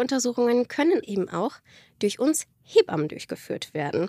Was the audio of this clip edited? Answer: no; 0 cuts

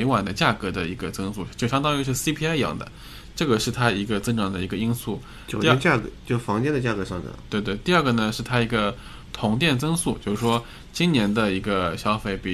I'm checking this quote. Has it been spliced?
no; 0 cuts

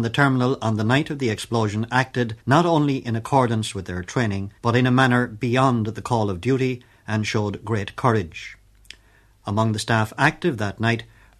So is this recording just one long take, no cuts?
no; 2 cuts; at 2.4 s, 4.6 s

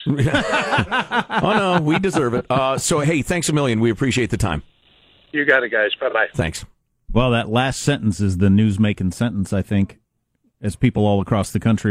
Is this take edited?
no; 0 cuts

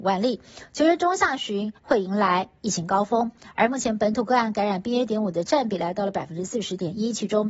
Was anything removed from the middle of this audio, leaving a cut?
yes; 1 cut; at 1.8 s

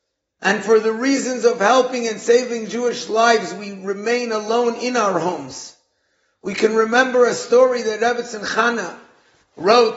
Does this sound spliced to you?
no; 0 cuts

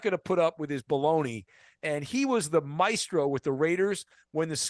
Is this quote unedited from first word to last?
yes; 0 cuts

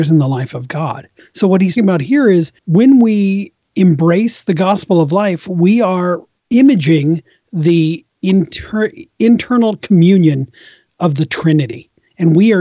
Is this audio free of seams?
no; 6 cuts; at 1.2 s, 1.8 s, 2.6 s, 3.7 s, 6.3 s, 8.1 s

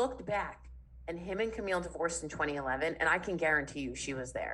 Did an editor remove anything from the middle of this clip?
no; 0 cuts

